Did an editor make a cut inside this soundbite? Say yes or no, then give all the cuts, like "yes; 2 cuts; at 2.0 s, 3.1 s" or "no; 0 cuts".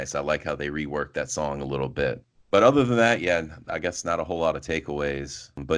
no; 0 cuts